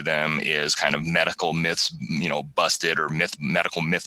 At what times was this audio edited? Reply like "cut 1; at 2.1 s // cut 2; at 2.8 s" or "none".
none